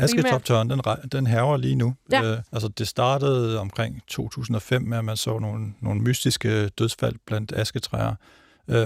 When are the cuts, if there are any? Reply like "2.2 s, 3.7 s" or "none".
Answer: 2.5 s